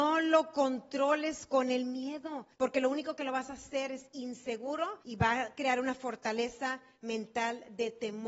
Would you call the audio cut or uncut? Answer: cut